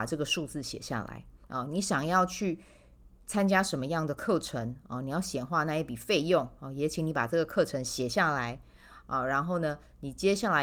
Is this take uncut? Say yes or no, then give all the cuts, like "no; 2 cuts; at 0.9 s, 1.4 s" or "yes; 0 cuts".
no; 1 cut; at 1.4 s